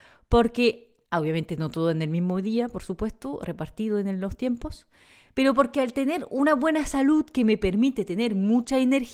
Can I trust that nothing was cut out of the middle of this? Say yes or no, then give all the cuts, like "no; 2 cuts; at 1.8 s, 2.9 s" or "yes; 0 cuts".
no; 1 cut; at 1.1 s